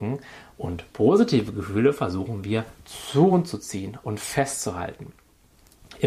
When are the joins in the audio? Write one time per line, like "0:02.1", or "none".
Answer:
none